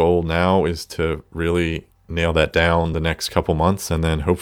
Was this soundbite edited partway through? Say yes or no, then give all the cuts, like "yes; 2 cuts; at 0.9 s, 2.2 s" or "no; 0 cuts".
no; 0 cuts